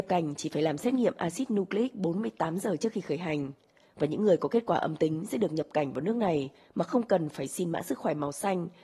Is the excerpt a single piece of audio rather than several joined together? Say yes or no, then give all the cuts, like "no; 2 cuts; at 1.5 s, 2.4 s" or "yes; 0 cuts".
yes; 0 cuts